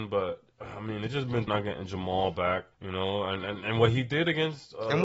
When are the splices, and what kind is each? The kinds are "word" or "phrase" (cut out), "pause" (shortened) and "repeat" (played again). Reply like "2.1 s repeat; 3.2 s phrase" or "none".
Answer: 1.5 s word; 2.7 s pause

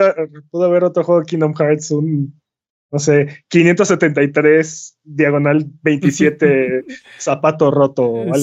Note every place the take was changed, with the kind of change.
none

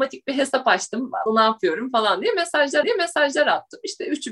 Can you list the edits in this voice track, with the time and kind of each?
1.3 s word; 2.8 s repeat

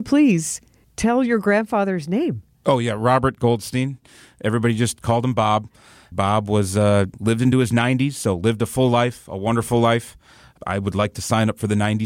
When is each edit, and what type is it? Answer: none

